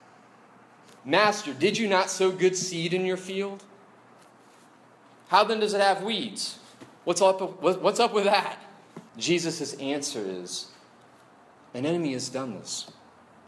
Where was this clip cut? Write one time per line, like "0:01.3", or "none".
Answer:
0:06.9
0:09.1